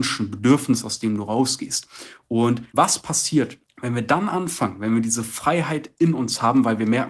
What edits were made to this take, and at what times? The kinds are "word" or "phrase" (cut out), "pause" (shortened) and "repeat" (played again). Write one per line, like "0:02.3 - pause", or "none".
0:02.7 - pause
0:03.6 - pause